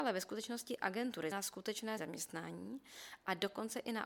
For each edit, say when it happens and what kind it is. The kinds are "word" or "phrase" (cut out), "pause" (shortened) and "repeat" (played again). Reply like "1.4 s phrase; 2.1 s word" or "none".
1.3 s word; 2.0 s word